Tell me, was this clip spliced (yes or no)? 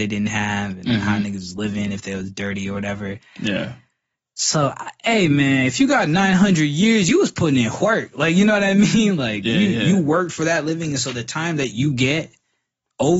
no